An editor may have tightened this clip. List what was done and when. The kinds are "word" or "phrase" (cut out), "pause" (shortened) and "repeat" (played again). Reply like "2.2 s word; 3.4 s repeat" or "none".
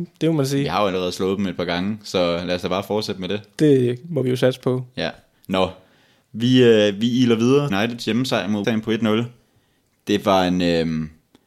7.7 s word; 8.6 s word